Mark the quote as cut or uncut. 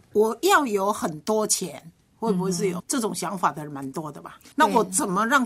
cut